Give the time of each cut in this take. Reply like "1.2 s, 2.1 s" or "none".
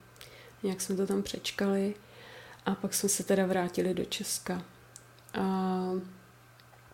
none